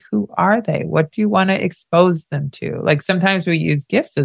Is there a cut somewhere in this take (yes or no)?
no